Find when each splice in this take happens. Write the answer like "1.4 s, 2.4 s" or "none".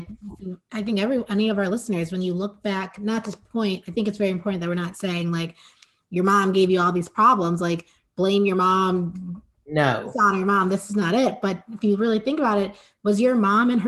none